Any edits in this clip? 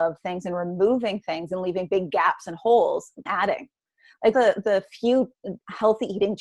yes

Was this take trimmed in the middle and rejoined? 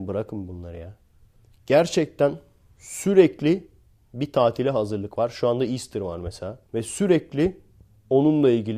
yes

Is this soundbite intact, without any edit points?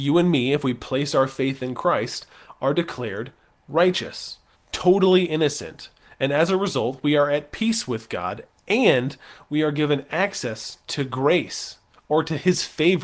no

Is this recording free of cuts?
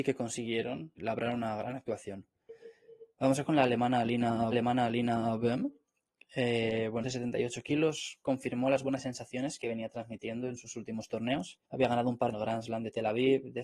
no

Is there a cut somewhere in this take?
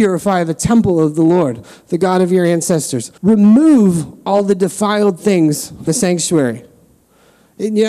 yes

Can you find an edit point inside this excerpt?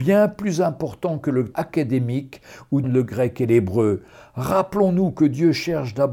yes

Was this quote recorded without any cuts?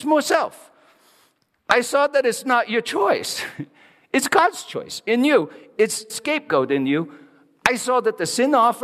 no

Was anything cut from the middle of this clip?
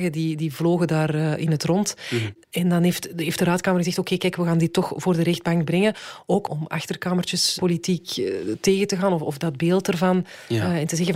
yes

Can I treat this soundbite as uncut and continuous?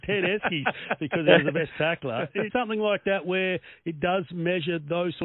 no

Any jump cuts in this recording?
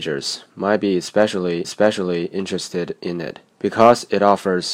yes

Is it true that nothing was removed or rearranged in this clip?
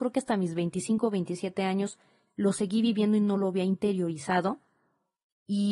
yes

